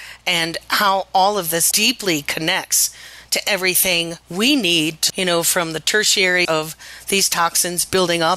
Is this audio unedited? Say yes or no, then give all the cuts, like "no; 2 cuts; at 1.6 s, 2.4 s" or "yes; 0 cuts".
no; 4 cuts; at 1.7 s, 4.2 s, 5.1 s, 6.4 s